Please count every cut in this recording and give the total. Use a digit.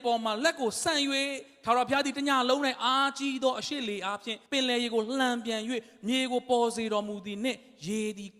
1